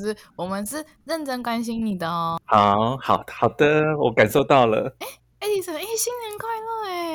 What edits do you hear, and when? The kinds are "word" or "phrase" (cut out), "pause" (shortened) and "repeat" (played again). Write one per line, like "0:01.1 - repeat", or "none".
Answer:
none